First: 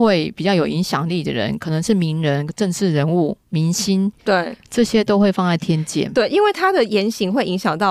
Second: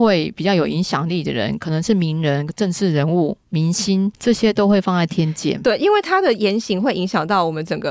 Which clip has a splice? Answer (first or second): second